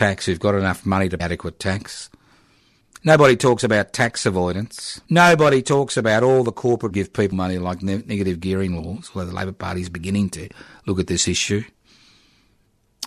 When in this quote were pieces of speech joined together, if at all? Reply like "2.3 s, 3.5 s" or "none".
1.2 s, 2.8 s, 5.0 s, 6.9 s, 7.3 s